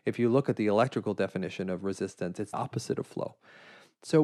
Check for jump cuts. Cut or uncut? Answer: cut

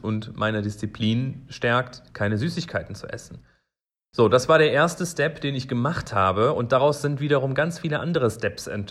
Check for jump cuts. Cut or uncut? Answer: uncut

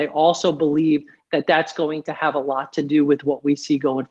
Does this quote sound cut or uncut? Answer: uncut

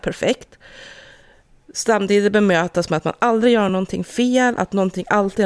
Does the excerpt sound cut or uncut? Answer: uncut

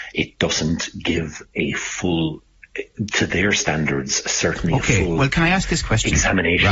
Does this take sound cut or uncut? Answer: uncut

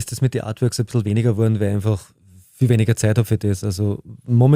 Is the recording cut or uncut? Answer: uncut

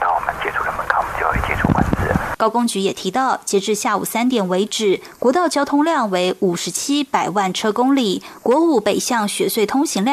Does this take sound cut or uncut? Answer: uncut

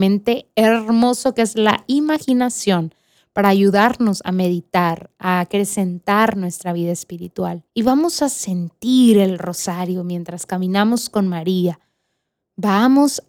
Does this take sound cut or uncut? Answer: cut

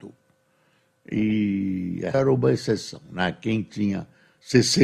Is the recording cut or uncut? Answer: cut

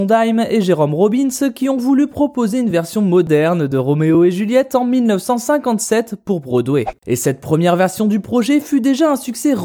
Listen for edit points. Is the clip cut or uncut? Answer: uncut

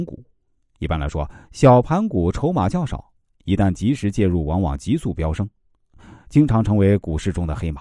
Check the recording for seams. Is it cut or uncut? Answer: uncut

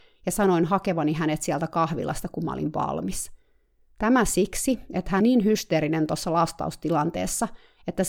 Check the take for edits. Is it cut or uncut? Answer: cut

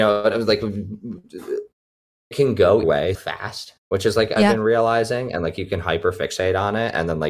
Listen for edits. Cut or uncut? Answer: cut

